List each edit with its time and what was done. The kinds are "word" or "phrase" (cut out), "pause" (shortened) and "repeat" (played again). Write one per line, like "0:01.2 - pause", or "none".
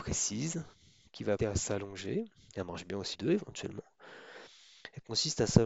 0:01.4 - word
0:03.1 - phrase